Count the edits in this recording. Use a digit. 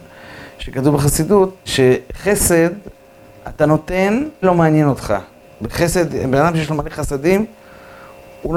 3